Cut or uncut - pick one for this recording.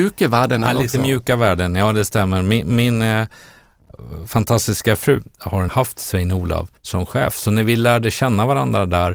cut